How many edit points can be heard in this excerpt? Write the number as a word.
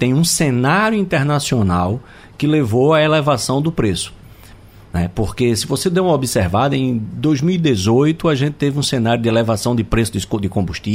zero